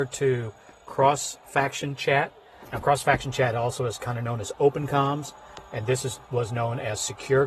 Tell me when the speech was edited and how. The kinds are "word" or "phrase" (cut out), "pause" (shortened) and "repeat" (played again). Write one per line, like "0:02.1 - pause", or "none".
none